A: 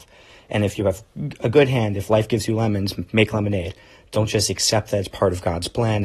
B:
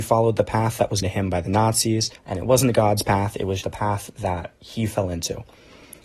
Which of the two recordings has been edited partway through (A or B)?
B